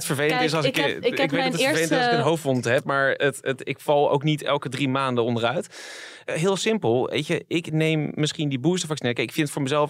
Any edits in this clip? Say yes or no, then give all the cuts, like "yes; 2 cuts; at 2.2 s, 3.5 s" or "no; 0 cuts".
yes; 1 cut; at 3.2 s